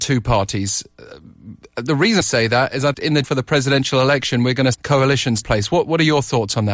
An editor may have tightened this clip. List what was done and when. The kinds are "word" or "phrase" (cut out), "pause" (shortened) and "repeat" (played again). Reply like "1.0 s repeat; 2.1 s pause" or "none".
2.2 s word; 2.9 s word; 3.2 s word; 4.7 s word; 5.4 s word

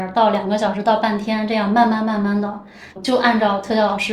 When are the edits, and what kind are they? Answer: 3.0 s word

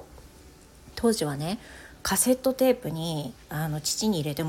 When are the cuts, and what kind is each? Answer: 3.4 s pause

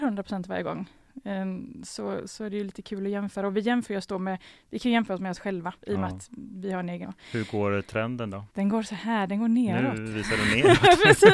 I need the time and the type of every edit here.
5.8 s pause; 7.0 s word; 8.5 s pause

